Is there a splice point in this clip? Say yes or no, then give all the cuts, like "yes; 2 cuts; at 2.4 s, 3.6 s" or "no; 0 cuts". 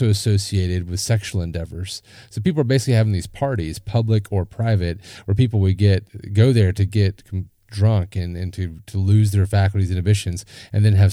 no; 0 cuts